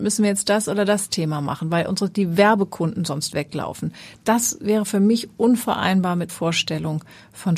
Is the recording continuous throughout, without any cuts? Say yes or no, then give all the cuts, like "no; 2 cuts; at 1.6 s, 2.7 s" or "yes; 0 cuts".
no; 1 cut; at 6.3 s